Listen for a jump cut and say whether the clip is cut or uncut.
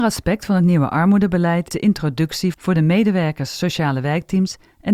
cut